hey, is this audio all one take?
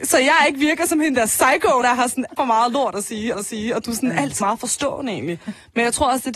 no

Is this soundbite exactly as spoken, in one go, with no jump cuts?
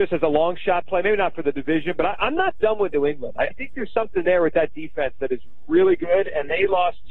no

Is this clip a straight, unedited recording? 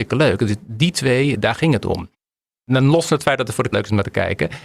no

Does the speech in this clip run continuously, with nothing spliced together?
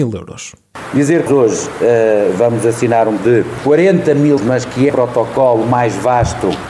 no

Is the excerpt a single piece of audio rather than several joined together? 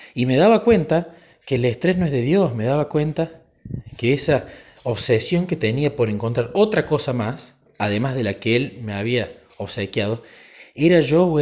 yes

